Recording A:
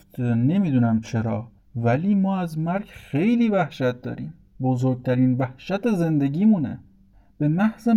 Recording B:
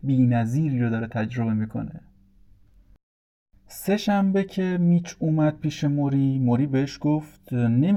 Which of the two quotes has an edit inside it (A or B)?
A